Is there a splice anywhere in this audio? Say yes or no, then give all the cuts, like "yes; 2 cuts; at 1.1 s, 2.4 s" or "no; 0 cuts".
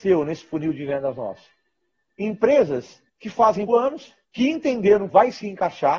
yes; 4 cuts; at 3.1 s, 3.7 s, 4.2 s, 5.1 s